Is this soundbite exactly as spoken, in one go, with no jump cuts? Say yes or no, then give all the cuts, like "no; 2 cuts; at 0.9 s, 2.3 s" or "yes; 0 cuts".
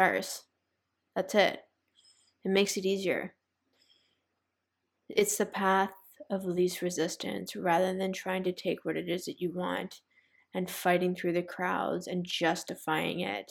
yes; 0 cuts